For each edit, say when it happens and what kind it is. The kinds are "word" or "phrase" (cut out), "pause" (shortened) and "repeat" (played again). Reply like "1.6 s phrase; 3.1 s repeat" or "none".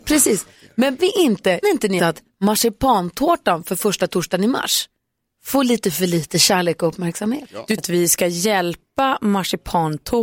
1.0 s word; 1.6 s word; 2.0 s word; 7.8 s word